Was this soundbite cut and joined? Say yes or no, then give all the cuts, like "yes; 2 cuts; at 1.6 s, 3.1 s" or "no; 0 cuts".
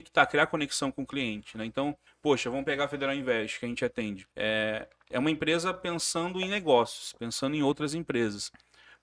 yes; 2 cuts; at 2.1 s, 4.3 s